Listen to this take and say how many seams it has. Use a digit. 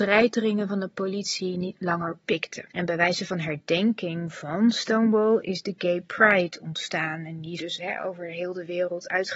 2